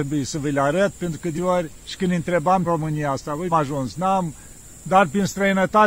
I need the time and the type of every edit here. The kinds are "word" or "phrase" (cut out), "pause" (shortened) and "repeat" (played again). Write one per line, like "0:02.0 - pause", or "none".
0:01.3 - word
0:01.8 - phrase
0:02.6 - phrase
0:03.5 - phrase